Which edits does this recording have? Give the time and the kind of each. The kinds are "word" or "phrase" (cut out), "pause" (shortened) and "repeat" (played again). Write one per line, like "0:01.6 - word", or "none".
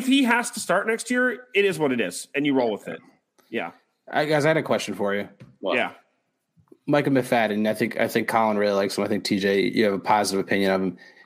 none

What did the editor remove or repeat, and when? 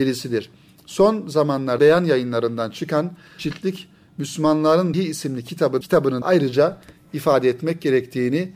0:01.8 - word
0:03.4 - word
0:04.9 - word
0:05.8 - word
0:06.2 - word

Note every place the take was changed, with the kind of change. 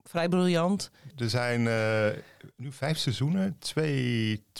0:01.1 - phrase
0:02.5 - pause

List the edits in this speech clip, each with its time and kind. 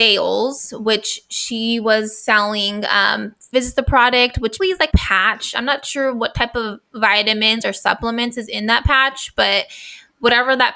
0:03.5 - word
0:04.6 - word
0:04.9 - word

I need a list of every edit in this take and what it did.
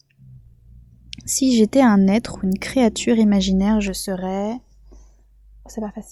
none

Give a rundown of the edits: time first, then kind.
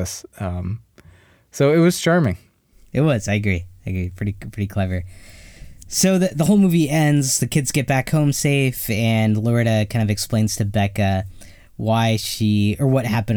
none

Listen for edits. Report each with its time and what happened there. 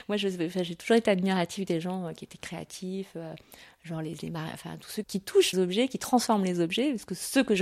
0:04.2 - word
0:05.0 - word
0:05.5 - word

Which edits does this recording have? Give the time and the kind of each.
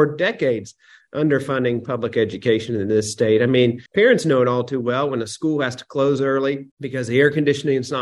0:03.9 - pause
0:06.7 - pause

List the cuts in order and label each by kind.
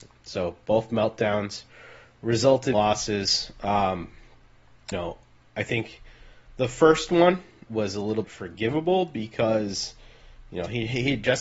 0:02.7 - word
0:04.9 - word
0:07.7 - word
0:08.2 - word

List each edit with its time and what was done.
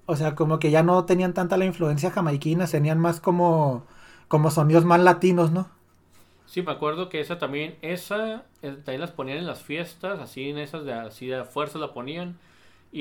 0:02.7 - phrase
0:06.7 - word

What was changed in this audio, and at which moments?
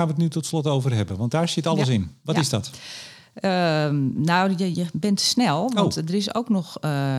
0:04.7 - word

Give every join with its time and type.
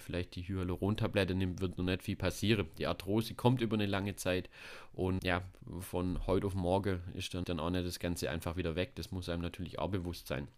0:05.2 - word
0:07.4 - word

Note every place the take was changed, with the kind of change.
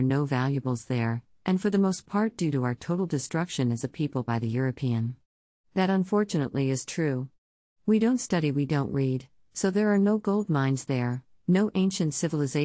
none

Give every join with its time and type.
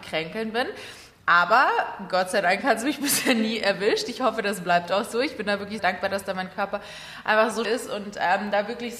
0:05.8 - phrase
0:07.6 - word

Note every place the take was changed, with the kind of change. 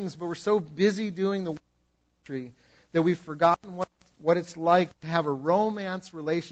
none

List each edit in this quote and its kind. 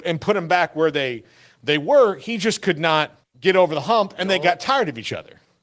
0:03.2 - pause

